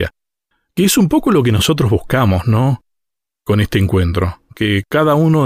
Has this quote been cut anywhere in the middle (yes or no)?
no